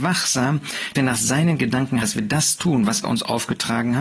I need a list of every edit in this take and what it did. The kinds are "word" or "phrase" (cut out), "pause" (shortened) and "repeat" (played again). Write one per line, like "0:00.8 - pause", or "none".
0:00.9 - word
0:02.0 - word
0:03.0 - word